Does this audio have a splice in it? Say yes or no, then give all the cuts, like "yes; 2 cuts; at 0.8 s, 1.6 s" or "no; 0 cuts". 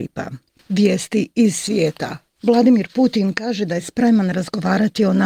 no; 0 cuts